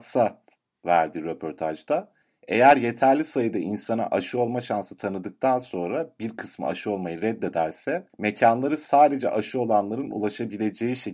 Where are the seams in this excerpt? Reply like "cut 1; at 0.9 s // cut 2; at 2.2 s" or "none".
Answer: cut 1; at 2.2 s // cut 2; at 8.1 s